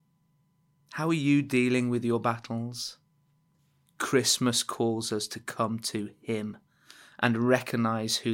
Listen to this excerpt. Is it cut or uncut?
cut